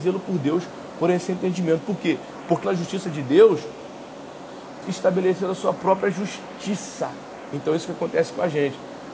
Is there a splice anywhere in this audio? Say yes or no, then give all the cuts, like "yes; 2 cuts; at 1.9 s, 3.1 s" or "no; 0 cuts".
yes; 2 cuts; at 2.6 s, 4.8 s